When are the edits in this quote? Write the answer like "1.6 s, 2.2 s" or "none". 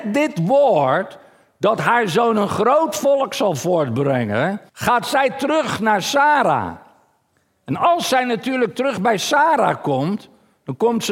4.7 s